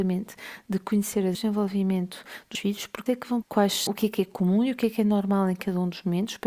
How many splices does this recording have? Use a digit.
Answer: 5